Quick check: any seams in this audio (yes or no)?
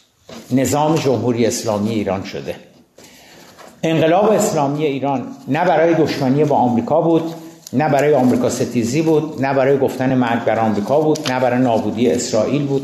no